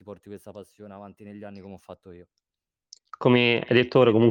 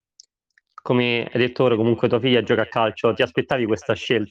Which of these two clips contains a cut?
first; 1 cut; at 3.1 s

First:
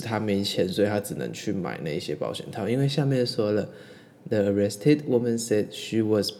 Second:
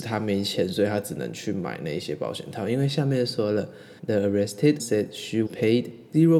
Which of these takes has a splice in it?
second; 3 cuts; at 4.0 s, 4.8 s, 5.5 s

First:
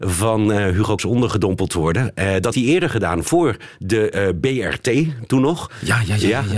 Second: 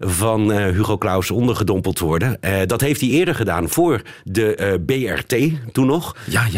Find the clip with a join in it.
first; 2 cuts; at 1.0 s, 2.5 s

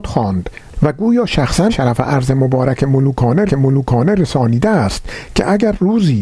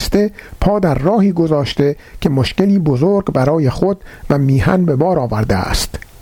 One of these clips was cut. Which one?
first; 2 cuts; at 1.7 s, 3.5 s

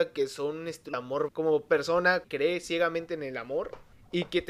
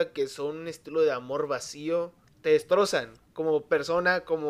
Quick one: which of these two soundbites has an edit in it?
first; 3 cuts; at 0.9 s, 1.3 s, 2.2 s

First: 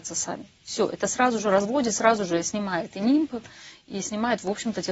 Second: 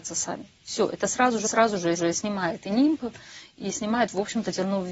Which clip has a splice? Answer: second; 2 cuts; at 1.4 s, 2.0 s

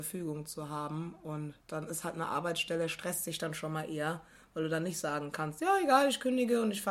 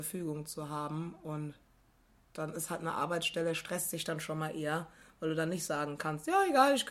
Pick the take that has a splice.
first; 1 cut; at 1.6 s

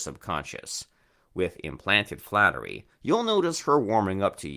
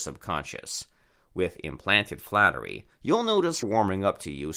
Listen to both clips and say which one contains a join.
second; 1 cut; at 3.6 s

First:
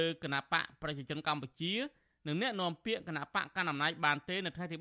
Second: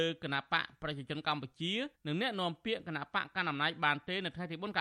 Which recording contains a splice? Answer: second; 1 cut; at 1.9 s

